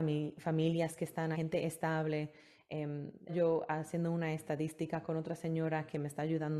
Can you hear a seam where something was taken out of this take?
yes; 2 cuts; at 1.3 s, 3.3 s

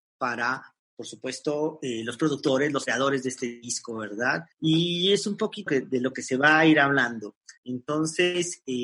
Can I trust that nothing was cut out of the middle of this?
no; 3 cuts; at 4.5 s, 5.7 s, 7.6 s

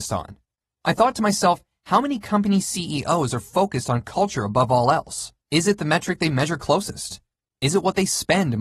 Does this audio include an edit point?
yes; 1 cut; at 5.4 s

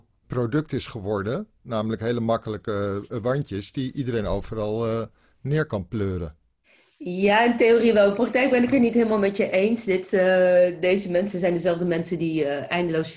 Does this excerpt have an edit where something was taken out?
no; 0 cuts

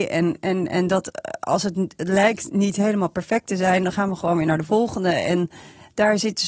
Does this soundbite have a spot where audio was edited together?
no; 0 cuts

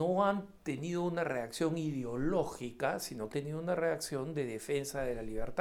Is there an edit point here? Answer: yes; 1 cut; at 3.3 s

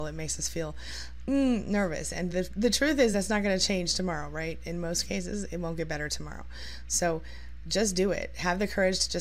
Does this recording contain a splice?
no; 0 cuts

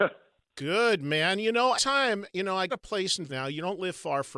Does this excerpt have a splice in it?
yes; 3 cuts; at 1.8 s, 2.7 s, 3.3 s

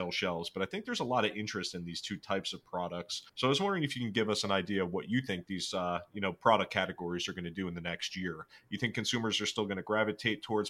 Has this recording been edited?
yes; 1 cut; at 3.3 s

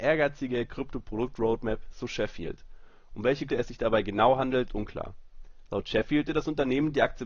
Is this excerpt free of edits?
no; 3 cuts; at 3.5 s, 4.7 s, 6.3 s

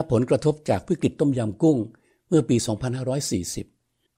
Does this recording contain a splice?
no; 0 cuts

